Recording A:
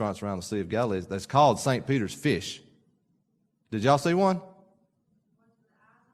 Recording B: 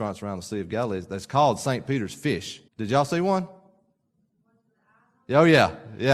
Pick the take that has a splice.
B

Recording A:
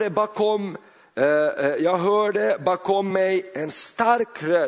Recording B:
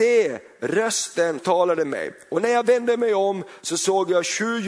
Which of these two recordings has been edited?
B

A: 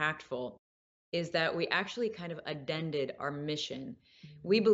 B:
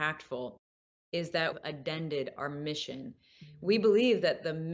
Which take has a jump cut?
B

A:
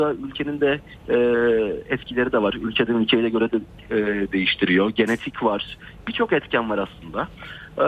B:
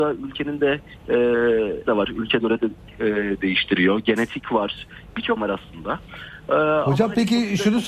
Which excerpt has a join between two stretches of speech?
B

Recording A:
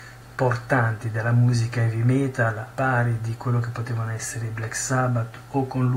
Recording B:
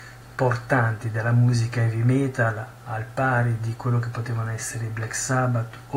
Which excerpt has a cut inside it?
A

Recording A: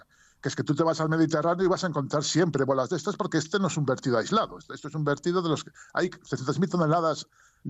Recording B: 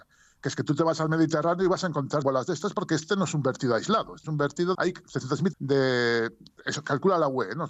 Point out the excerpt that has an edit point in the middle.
B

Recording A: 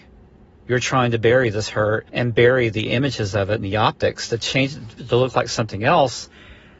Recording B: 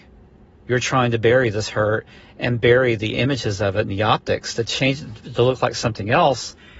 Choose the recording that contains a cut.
A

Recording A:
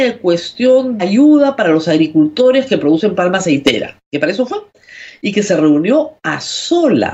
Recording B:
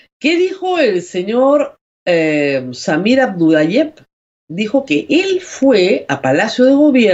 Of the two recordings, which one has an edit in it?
A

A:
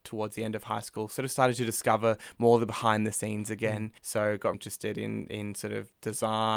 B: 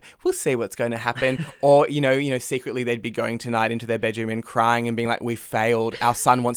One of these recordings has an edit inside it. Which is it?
A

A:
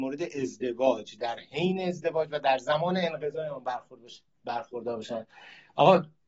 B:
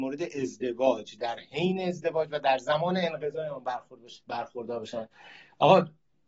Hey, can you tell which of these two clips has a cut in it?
B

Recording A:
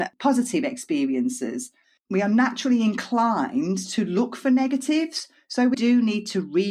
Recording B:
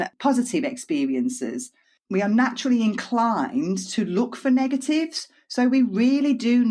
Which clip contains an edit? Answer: A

